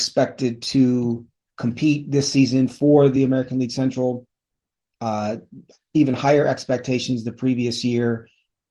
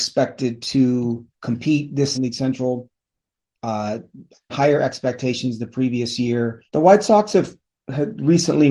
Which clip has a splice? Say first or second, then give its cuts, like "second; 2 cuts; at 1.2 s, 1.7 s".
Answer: second; 4 cuts; at 1.3 s, 2.1 s, 4.5 s, 6.7 s